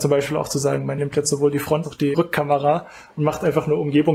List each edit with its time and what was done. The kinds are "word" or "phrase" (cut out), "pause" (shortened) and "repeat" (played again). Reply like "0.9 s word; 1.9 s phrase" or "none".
1.0 s word; 1.8 s word; 2.1 s word

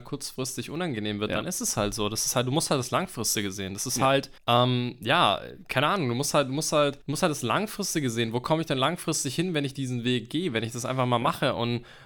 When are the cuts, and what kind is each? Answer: 4.4 s pause; 7.0 s pause

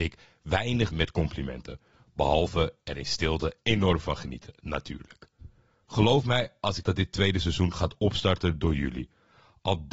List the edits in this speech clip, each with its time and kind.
0.9 s word; 6.8 s word

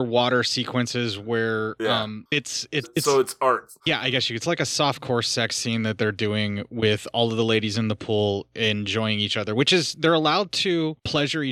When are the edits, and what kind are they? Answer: 2.8 s word; 4.4 s phrase

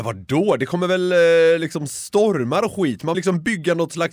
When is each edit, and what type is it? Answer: 3.1 s word

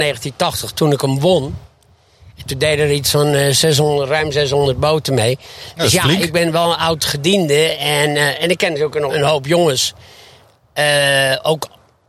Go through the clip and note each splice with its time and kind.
9.1 s word

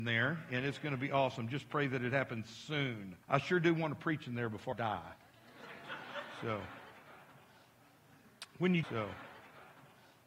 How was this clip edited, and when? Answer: 3.2 s pause; 4.7 s word; 8.8 s repeat

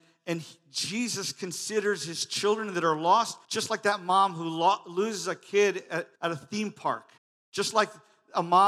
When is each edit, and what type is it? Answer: 3.4 s pause; 6.2 s pause; 7.2 s pause

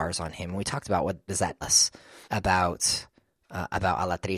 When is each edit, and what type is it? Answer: 1.3 s word; 1.6 s word; 2.2 s pause

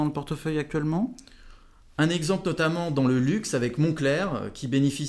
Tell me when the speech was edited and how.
none

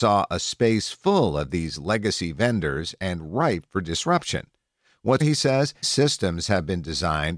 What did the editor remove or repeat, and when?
5.2 s word; 5.8 s word

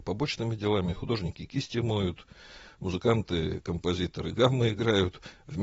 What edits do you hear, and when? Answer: none

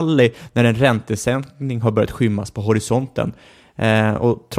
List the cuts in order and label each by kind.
none

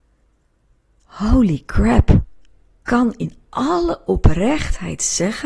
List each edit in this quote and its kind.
2.9 s word

